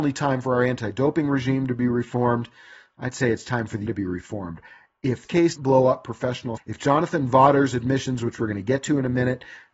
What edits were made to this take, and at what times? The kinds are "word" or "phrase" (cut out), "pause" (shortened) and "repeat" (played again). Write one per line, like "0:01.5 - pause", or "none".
0:03.9 - word
0:05.2 - word
0:05.6 - word
0:06.6 - word